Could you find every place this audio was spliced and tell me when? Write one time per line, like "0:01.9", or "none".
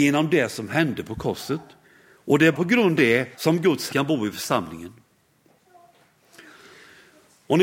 0:01.8
0:02.5
0:03.0
0:03.3
0:03.9